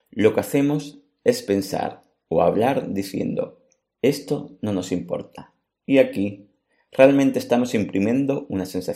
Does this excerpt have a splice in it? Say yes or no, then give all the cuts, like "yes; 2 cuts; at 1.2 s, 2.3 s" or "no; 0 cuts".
no; 0 cuts